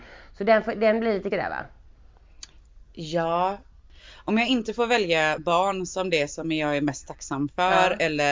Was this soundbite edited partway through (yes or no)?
yes